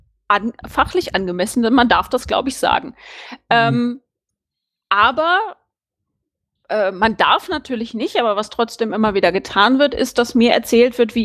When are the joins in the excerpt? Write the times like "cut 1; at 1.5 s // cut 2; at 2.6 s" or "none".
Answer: none